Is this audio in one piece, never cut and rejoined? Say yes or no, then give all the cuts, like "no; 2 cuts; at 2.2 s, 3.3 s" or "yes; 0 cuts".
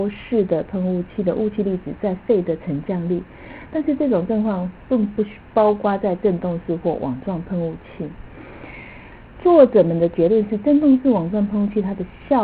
yes; 0 cuts